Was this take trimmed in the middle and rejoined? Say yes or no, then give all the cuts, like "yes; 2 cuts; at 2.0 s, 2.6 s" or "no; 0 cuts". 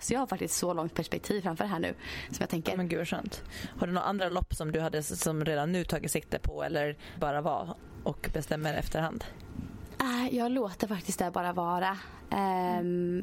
yes; 1 cut; at 7.2 s